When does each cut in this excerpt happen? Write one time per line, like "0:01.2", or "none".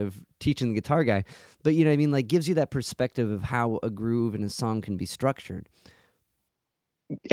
none